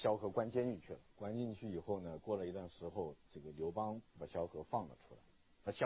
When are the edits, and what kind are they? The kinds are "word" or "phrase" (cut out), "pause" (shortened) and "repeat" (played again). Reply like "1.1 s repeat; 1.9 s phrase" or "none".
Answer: 1.1 s pause; 3.2 s pause